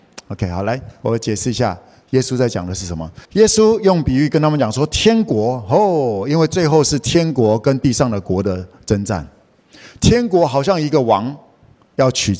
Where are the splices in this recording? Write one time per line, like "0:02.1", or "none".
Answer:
0:03.2